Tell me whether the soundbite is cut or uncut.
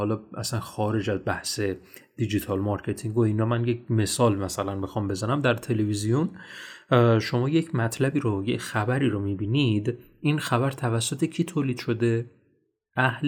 uncut